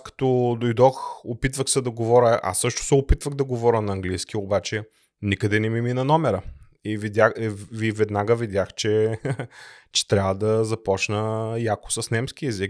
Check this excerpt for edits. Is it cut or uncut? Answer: uncut